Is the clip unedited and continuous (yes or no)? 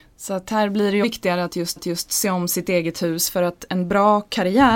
no